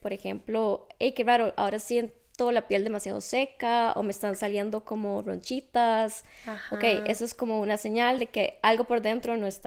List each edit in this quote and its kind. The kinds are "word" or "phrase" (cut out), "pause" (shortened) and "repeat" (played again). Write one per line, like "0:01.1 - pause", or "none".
none